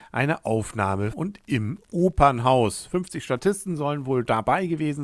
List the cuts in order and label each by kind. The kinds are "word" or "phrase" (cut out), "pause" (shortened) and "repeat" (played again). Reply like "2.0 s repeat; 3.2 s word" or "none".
1.1 s word